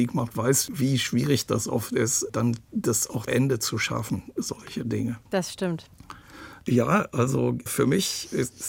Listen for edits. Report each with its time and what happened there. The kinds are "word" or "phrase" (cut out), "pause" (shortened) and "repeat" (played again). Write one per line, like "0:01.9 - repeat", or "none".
0:03.3 - word
0:05.3 - pause
0:07.7 - word